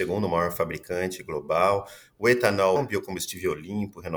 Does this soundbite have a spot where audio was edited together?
yes; 1 cut; at 2.8 s

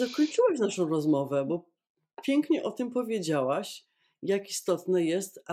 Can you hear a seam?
no; 0 cuts

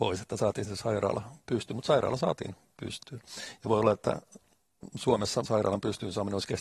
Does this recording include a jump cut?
yes; 1 cut; at 5.5 s

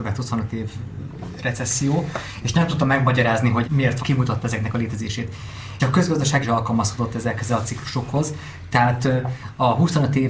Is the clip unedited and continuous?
no; 4 cuts; at 3.6 s, 4.0 s, 5.8 s, 6.4 s

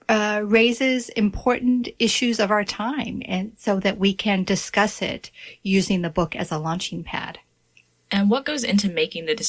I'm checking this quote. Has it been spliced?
no; 0 cuts

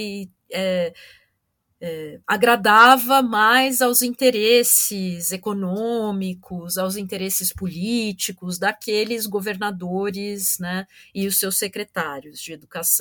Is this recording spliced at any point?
no; 0 cuts

